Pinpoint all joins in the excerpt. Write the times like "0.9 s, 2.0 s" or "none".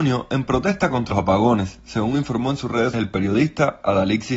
1.1 s, 2.9 s